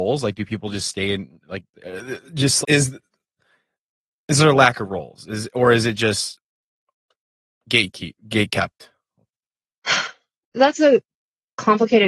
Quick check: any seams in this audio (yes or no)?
yes